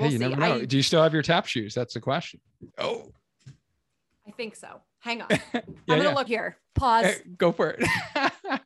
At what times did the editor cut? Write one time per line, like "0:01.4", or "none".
0:02.7
0:06.3